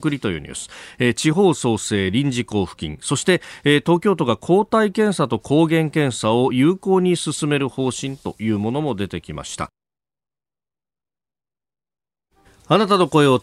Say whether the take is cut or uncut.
uncut